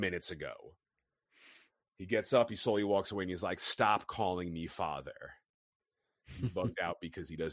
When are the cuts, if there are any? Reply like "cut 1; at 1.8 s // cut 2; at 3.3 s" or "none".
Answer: none